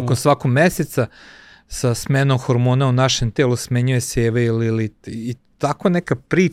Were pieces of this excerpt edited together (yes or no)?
no